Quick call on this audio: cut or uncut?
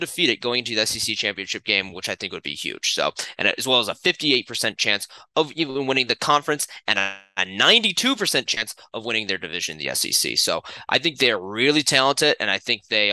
uncut